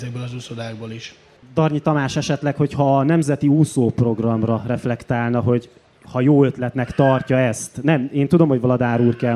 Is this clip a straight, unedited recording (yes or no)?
yes